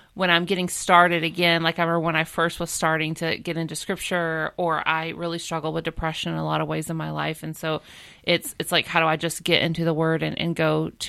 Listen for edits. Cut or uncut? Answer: uncut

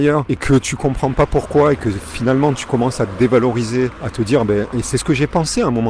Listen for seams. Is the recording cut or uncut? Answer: uncut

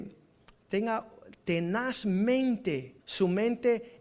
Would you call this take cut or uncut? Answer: cut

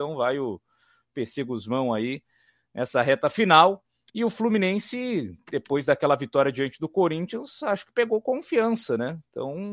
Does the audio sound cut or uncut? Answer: uncut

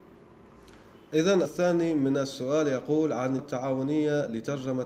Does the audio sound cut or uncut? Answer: cut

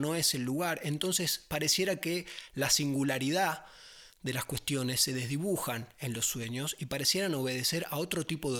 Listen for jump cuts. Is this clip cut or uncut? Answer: uncut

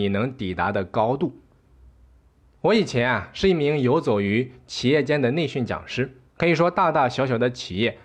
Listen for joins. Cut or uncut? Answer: cut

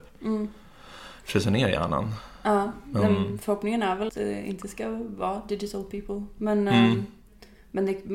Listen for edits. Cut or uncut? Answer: cut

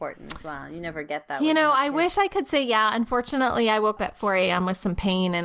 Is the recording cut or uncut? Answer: cut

